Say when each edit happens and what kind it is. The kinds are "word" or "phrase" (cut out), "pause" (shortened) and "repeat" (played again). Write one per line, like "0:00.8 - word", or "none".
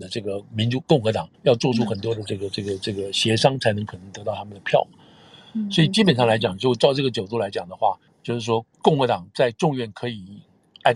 0:01.3 - pause
0:08.1 - pause
0:08.7 - pause